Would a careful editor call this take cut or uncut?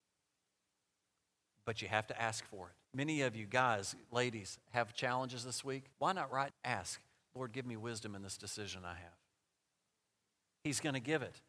cut